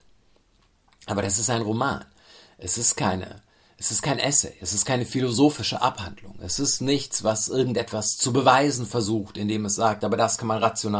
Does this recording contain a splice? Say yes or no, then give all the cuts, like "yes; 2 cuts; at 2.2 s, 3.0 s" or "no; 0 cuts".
no; 0 cuts